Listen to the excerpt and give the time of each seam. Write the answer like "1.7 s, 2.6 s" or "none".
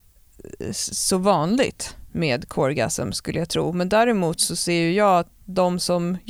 none